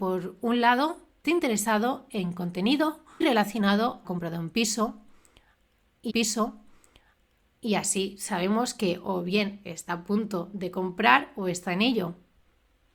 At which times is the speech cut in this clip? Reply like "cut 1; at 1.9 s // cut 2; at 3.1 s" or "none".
cut 1; at 1.2 s // cut 2; at 3.2 s // cut 3; at 4.0 s // cut 4; at 6.1 s